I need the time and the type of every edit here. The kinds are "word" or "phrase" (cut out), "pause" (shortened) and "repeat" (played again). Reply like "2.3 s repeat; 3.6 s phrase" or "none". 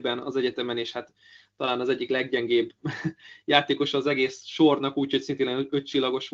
none